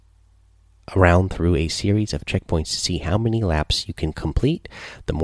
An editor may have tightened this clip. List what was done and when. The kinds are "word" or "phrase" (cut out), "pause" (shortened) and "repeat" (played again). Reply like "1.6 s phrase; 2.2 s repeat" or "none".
none